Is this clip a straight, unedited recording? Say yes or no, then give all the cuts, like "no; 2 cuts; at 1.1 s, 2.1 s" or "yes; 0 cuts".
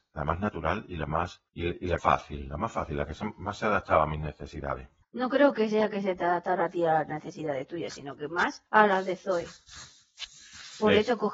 no; 4 cuts; at 1.5 s, 2.0 s, 5.0 s, 8.7 s